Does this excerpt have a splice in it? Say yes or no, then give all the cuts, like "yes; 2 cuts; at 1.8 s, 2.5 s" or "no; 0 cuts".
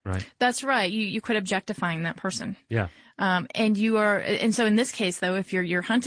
no; 0 cuts